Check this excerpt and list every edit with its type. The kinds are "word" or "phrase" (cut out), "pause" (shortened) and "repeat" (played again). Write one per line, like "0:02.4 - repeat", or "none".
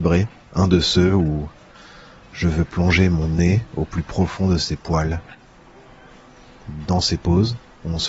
none